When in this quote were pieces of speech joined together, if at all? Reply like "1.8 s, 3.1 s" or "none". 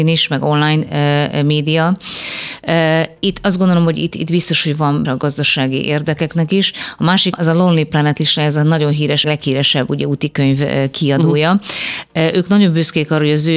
5.0 s, 7.3 s, 9.2 s